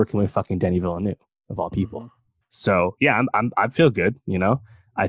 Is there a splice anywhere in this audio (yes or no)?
no